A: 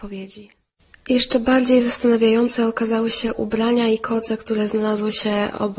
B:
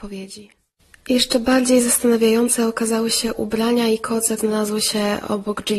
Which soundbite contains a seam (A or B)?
B